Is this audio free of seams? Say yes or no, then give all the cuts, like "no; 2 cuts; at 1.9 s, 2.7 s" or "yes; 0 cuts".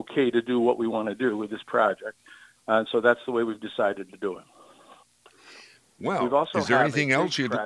yes; 0 cuts